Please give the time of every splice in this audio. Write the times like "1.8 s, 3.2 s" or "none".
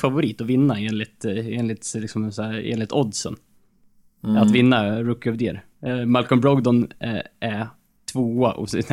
none